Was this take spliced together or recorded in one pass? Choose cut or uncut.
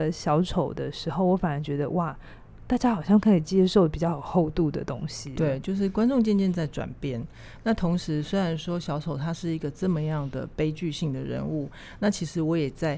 uncut